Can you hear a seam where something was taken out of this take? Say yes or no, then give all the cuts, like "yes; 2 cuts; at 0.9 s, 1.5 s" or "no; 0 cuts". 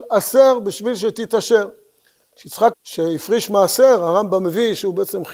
yes; 1 cut; at 2.7 s